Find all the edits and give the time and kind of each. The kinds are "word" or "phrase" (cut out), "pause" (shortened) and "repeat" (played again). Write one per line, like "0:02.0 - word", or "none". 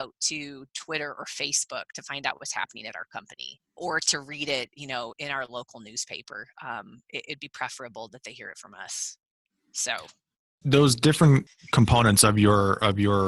0:03.8 - word
0:05.1 - word
0:10.6 - word